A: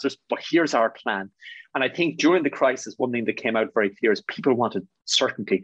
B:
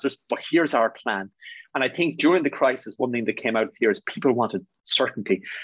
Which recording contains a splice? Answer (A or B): B